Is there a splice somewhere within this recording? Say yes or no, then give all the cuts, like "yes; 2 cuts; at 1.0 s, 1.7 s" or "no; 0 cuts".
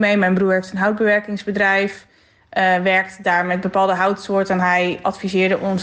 no; 0 cuts